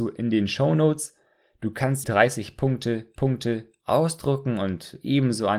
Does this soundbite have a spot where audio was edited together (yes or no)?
yes